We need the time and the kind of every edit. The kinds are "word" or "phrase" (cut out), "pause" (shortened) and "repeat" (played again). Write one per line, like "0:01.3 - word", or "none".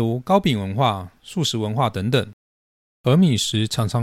none